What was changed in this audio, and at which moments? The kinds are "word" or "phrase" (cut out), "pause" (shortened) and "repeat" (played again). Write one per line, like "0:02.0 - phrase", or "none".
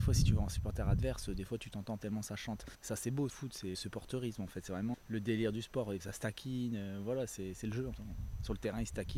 0:02.0 - word
0:02.7 - pause
0:03.3 - phrase
0:03.7 - word
0:04.9 - word
0:06.0 - word
0:07.9 - word